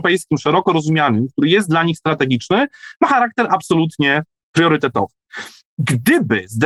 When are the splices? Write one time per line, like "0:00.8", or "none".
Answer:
none